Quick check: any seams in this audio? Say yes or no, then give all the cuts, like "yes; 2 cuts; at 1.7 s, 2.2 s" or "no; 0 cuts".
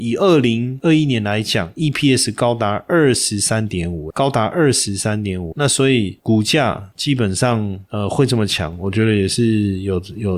yes; 2 cuts; at 4.1 s, 5.5 s